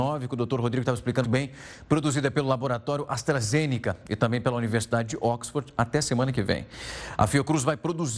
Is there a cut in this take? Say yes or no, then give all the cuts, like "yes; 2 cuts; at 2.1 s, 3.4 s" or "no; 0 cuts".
yes; 1 cut; at 1.2 s